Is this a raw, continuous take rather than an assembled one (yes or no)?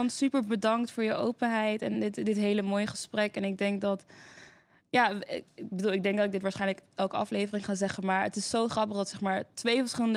yes